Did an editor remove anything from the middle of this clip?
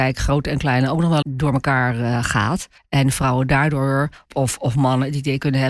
yes; 3 cuts; at 1.2 s, 2.8 s, 4.2 s

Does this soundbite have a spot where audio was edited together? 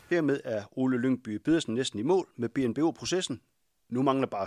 no; 0 cuts

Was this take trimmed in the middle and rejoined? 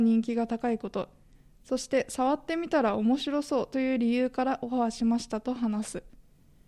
no; 0 cuts

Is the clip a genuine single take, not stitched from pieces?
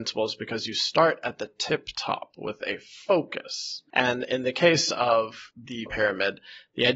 no; 1 cut; at 5.9 s

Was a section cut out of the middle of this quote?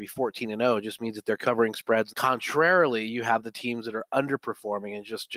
yes; 1 cut; at 2.1 s

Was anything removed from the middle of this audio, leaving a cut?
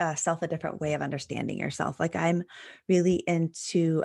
no; 0 cuts

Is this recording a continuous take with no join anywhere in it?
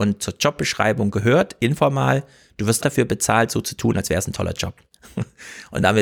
no; 1 cut; at 2.8 s

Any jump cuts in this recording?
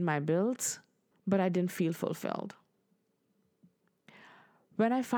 yes; 1 cut; at 1.1 s

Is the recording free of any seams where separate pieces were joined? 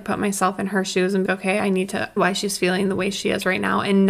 no; 2 cuts; at 1.3 s, 2.2 s

